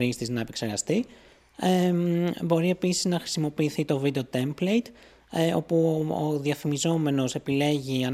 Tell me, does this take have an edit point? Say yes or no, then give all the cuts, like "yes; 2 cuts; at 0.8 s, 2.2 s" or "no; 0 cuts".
no; 0 cuts